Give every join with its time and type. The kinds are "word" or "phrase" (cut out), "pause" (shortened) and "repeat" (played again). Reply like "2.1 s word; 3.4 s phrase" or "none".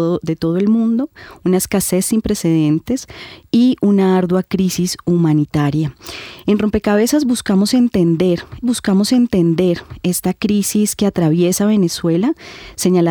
8.6 s repeat